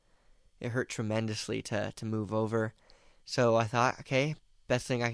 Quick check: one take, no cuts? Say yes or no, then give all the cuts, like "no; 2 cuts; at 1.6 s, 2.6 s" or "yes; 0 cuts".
yes; 0 cuts